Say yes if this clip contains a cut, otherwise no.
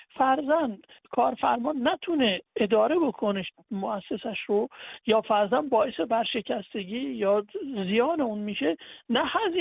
no